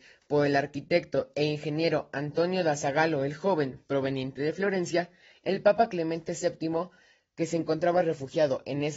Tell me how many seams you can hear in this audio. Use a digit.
0